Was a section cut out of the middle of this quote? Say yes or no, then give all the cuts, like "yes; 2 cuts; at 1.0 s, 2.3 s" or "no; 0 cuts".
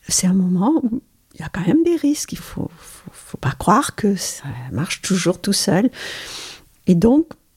yes; 1 cut; at 2.4 s